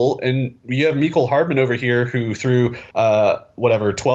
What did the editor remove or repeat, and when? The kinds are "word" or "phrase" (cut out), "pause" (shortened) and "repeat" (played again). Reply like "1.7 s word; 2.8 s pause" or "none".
2.9 s pause